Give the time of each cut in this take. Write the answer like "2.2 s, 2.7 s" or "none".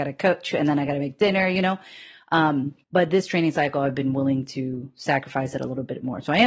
2.8 s